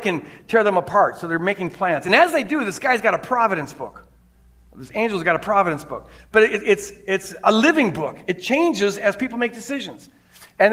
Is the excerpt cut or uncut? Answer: uncut